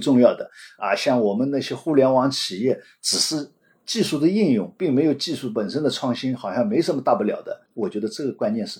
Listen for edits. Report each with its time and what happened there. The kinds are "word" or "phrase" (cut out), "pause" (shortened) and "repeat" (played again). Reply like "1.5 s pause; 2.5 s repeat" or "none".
7.7 s pause